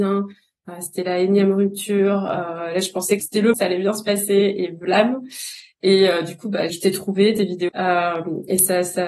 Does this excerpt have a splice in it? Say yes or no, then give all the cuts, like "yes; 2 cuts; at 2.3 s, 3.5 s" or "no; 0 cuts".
yes; 4 cuts; at 3.2 s, 3.5 s, 6.7 s, 7.7 s